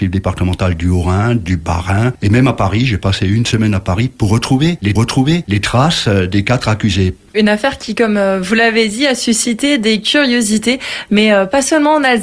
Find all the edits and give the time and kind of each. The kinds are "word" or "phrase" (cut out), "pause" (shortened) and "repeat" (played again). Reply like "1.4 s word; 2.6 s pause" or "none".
5.0 s repeat